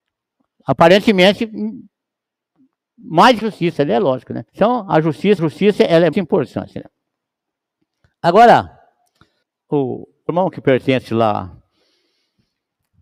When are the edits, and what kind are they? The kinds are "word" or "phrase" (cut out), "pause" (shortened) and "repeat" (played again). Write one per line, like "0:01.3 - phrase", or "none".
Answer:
0:03.4 - phrase
0:04.5 - pause
0:05.4 - repeat
0:06.1 - word
0:09.4 - pause
0:10.3 - word